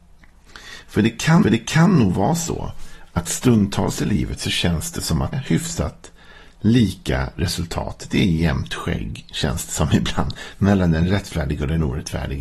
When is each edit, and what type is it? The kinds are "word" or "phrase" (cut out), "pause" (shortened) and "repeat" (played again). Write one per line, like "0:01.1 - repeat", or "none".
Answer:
0:01.4 - repeat
0:05.3 - word

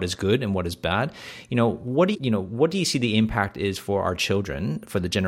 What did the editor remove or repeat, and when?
0:02.1 - word

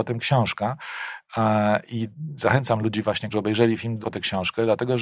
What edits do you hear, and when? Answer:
0:03.3 - word
0:04.0 - word

